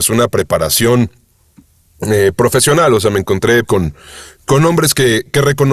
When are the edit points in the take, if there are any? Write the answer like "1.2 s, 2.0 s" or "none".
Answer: 3.6 s